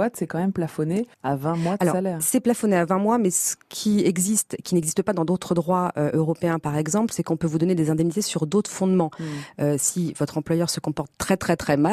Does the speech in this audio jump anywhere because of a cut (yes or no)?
yes